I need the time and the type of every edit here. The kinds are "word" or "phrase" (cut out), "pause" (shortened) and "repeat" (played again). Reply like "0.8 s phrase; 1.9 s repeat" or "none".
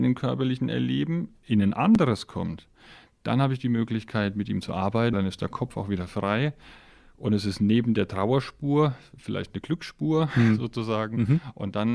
5.1 s word